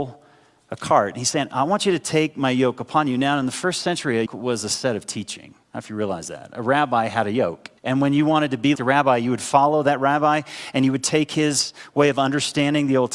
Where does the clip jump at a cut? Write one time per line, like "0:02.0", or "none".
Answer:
0:04.3
0:05.6
0:07.8
0:08.7

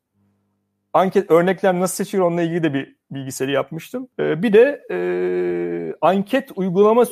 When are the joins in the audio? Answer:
0:04.1

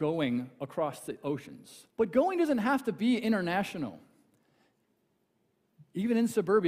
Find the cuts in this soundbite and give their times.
0:01.9

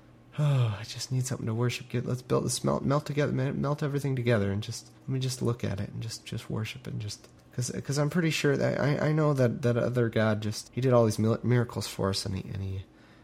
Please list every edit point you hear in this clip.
0:05.0
0:07.4
0:10.6

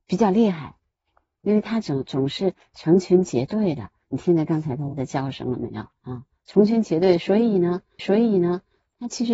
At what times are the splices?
0:06.0
0:08.0

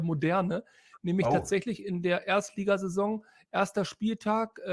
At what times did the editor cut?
none

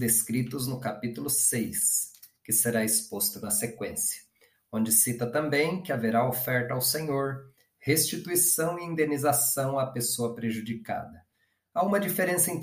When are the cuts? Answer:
none

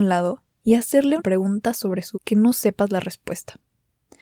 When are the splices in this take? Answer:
0:01.2
0:02.1

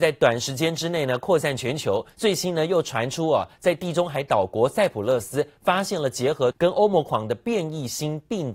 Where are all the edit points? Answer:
0:06.5

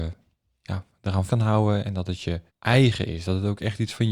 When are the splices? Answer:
0:01.3
0:02.5

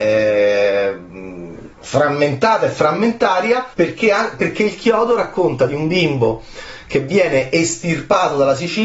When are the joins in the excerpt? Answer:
0:01.7
0:03.7

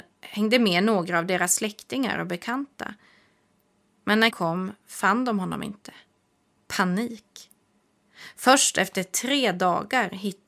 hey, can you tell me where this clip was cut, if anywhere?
0:04.3

